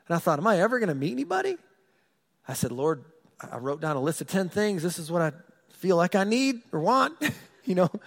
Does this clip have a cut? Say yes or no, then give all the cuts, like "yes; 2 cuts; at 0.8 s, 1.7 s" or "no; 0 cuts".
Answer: no; 0 cuts